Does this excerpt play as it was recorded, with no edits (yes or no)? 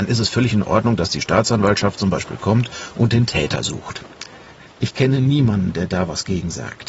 yes